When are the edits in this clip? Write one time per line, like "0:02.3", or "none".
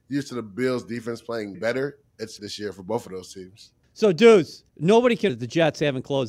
0:01.5
0:02.4
0:04.7
0:05.3